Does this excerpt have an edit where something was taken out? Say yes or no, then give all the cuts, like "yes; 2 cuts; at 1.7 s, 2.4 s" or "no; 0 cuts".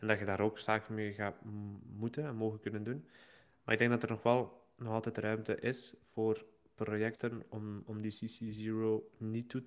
no; 0 cuts